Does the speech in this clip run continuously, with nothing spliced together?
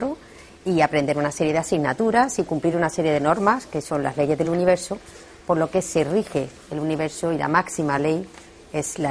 yes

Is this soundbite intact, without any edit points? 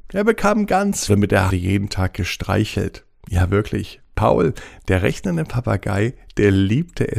no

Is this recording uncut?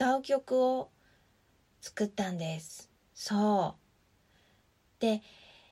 no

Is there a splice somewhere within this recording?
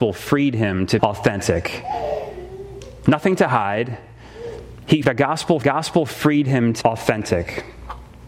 yes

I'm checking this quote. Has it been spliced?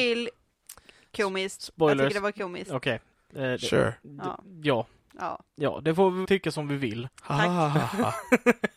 yes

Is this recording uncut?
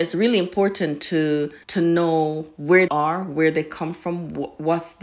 no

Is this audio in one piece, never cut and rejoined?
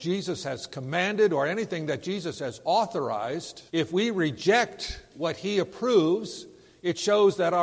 no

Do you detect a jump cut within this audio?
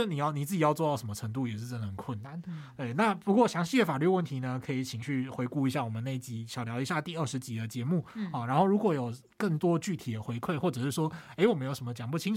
yes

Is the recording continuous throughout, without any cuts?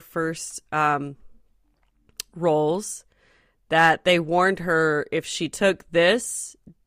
yes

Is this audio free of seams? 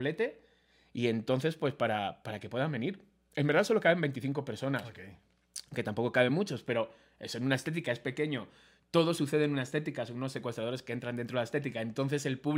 yes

